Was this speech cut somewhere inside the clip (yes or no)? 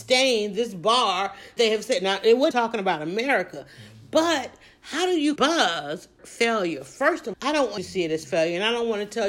yes